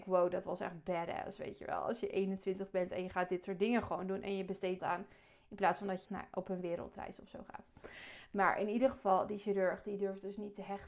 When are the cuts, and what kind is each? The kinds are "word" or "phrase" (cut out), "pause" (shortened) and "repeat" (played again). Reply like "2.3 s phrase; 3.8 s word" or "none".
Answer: 4.8 s phrase; 6.1 s word